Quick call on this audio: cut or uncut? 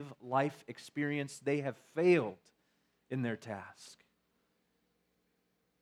uncut